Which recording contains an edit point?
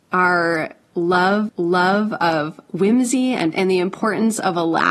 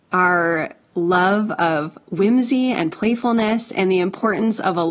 first; 2 cuts; at 1.5 s, 3.5 s

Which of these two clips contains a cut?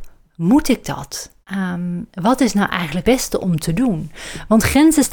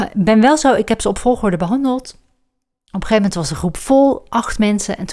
first; 3 cuts; at 1.4 s, 2.1 s, 3.0 s

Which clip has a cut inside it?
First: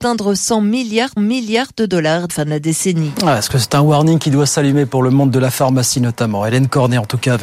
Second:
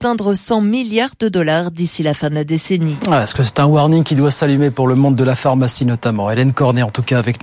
first; 2 cuts; at 1.2 s, 2.3 s

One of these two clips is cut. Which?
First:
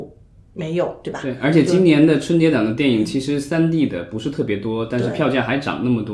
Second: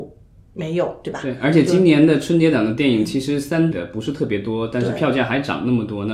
second; 1 cut; at 3.7 s

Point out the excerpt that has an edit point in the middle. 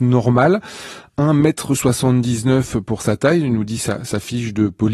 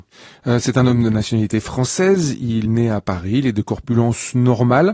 second; 1 cut; at 2.7 s

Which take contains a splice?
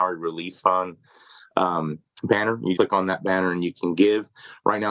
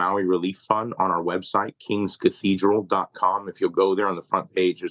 first; 1 cut; at 2.8 s

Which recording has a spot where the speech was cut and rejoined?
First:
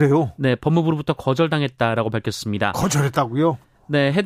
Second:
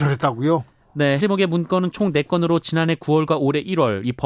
second; 1 cut; at 1.2 s

